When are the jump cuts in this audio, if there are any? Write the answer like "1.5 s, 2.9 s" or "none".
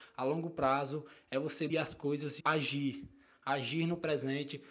1.7 s, 2.4 s